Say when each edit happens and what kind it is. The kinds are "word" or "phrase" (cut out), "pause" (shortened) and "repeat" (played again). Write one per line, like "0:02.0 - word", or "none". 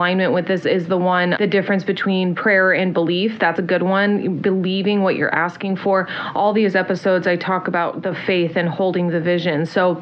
0:01.4 - word